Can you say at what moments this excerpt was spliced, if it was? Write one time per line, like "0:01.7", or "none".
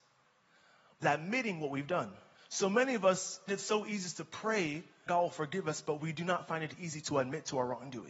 0:01.0
0:02.3
0:03.5
0:05.1